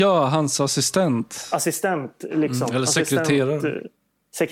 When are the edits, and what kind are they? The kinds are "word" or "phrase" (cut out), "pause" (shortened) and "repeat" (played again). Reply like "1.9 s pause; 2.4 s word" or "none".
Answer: none